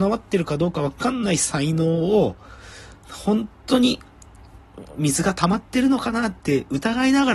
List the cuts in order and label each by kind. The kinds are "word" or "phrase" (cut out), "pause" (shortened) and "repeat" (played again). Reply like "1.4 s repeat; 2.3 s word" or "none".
3.0 s pause